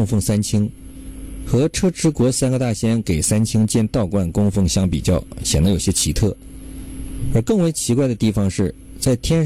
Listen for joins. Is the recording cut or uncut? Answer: uncut